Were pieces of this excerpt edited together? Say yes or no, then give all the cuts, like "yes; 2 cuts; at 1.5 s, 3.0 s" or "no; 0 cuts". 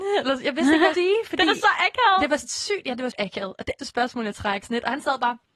yes; 4 cuts; at 0.9 s, 3.1 s, 3.8 s, 4.6 s